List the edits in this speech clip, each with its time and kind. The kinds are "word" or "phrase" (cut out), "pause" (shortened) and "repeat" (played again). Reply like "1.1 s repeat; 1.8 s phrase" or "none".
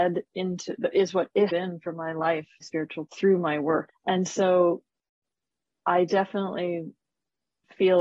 1.5 s word; 2.6 s word; 3.1 s word; 3.9 s word